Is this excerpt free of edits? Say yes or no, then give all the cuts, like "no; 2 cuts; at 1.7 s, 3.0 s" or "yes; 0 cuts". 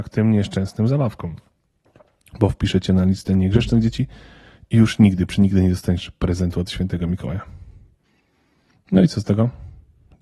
yes; 0 cuts